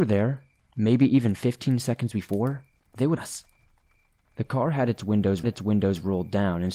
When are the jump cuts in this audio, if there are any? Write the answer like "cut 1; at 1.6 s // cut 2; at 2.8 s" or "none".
cut 1; at 3.2 s // cut 2; at 5.4 s